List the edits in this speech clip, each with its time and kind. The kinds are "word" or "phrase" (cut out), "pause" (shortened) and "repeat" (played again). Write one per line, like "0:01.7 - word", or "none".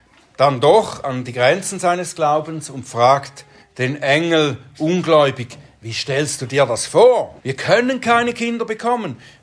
0:03.6 - pause
0:07.4 - pause